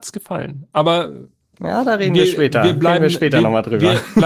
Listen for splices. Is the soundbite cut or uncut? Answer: uncut